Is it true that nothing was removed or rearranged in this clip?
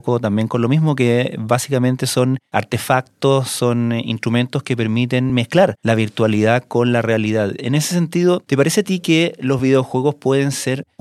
yes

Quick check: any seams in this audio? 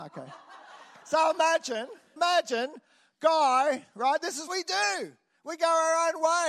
yes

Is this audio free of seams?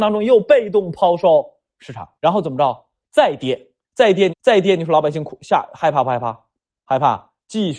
no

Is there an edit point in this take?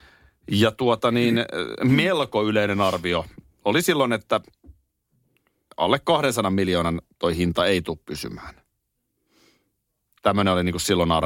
no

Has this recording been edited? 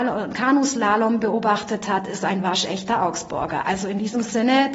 no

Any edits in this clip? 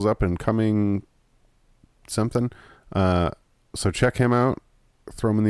no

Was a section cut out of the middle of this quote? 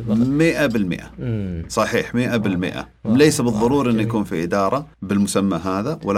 yes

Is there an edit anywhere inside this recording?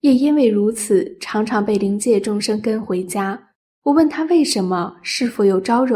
no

